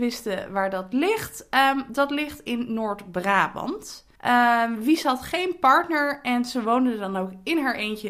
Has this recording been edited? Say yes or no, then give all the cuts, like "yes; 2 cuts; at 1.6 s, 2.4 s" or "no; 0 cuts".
yes; 1 cut; at 4.2 s